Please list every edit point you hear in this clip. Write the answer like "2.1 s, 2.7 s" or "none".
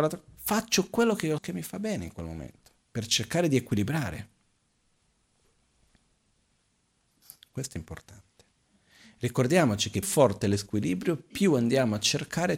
1.4 s, 2.8 s, 10.0 s